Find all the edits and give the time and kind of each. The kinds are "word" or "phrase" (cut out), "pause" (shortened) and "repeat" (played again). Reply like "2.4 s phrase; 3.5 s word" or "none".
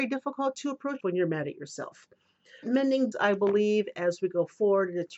1.0 s word; 2.6 s word; 3.1 s word